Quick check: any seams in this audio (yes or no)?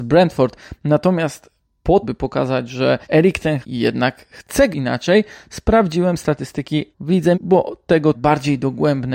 yes